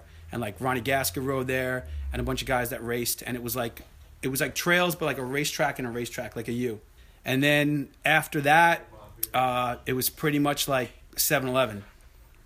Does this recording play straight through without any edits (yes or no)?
no